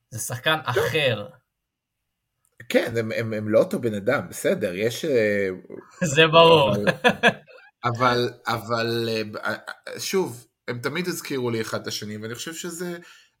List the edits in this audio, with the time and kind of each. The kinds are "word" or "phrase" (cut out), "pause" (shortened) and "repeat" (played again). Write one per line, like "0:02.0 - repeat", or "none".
none